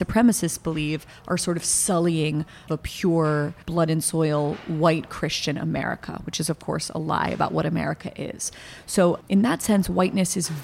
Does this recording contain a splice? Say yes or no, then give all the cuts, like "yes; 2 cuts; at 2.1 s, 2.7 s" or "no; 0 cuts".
yes; 2 cuts; at 2.7 s, 3.6 s